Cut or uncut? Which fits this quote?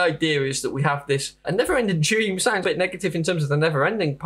cut